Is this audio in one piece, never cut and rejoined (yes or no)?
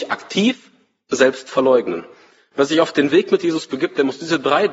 yes